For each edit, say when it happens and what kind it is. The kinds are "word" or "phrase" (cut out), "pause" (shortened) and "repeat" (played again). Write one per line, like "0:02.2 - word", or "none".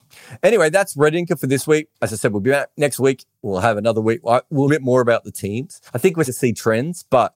0:01.9 - pause
0:04.7 - phrase
0:05.9 - pause
0:06.3 - word